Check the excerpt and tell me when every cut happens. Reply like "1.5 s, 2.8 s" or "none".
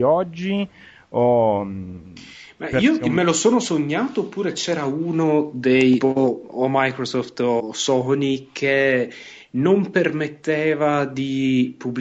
6.0 s, 7.6 s